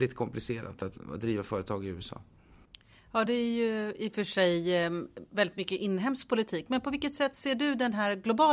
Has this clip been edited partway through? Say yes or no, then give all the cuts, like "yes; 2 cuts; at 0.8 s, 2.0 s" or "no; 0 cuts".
no; 0 cuts